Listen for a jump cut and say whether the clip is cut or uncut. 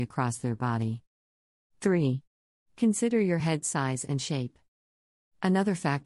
uncut